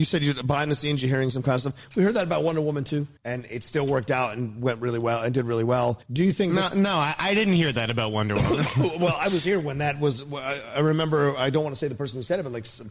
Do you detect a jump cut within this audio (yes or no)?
yes